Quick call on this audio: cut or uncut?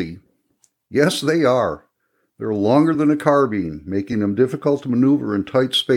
uncut